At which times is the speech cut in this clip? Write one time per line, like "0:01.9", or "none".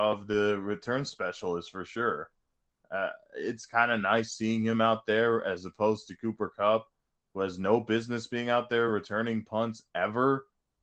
none